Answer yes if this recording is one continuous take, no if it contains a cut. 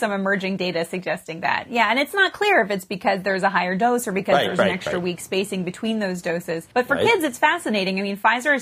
no